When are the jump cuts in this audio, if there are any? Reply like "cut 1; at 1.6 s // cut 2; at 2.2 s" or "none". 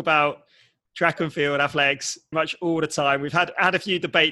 cut 1; at 2.3 s

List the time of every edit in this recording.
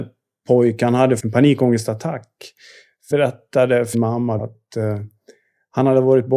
cut 1; at 1.2 s // cut 2; at 3.1 s // cut 3; at 3.9 s // cut 4; at 4.4 s

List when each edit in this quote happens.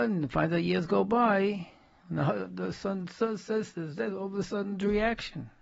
none

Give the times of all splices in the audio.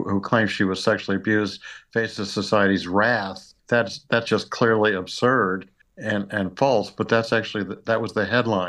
cut 1; at 3.6 s // cut 2; at 5.8 s

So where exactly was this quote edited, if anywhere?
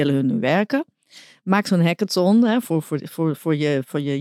none

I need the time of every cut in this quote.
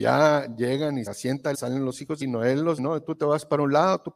cut 1; at 1.1 s // cut 2; at 1.5 s // cut 3; at 2.2 s // cut 4; at 2.8 s

